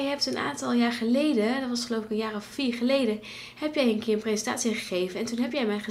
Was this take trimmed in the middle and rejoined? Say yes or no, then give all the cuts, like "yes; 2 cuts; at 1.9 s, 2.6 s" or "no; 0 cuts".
no; 0 cuts